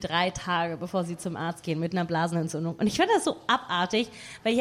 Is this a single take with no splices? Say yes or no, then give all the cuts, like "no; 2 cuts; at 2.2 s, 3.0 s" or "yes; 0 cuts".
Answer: yes; 0 cuts